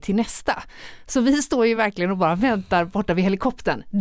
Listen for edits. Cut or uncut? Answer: uncut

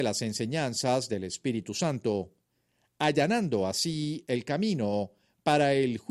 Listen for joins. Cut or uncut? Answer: uncut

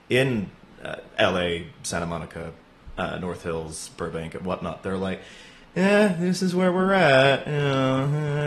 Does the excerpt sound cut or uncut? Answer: uncut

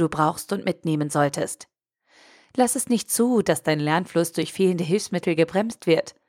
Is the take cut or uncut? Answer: uncut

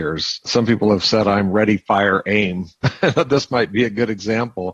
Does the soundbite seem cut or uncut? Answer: uncut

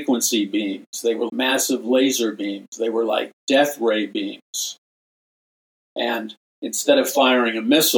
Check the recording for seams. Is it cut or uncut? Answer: cut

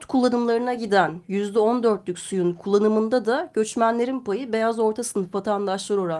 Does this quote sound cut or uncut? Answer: uncut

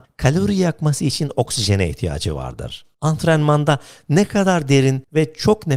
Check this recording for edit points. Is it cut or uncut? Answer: uncut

